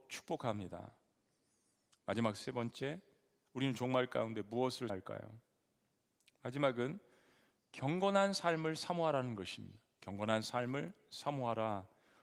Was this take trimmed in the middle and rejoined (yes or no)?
yes